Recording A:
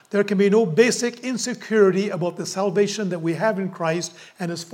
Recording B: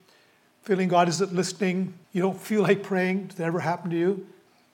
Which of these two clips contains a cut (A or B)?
B